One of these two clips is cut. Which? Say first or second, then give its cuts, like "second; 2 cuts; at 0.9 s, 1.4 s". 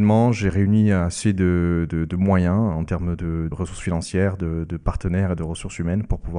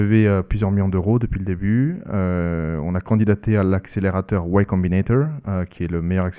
first; 1 cut; at 3.5 s